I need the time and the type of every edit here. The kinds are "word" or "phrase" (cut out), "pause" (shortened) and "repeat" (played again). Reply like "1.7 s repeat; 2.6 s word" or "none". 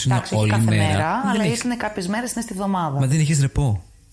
none